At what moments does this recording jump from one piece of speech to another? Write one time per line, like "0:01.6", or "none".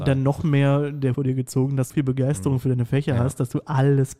0:01.1
0:01.9